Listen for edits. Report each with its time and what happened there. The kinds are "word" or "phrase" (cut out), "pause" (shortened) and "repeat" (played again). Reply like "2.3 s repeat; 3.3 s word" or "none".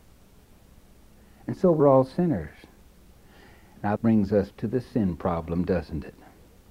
1.8 s word; 4.0 s word; 4.5 s word